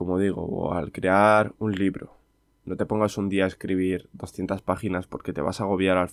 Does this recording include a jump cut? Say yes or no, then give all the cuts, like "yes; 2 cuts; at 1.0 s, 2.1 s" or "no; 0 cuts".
no; 0 cuts